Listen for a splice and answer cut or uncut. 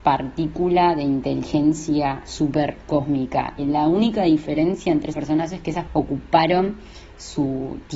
cut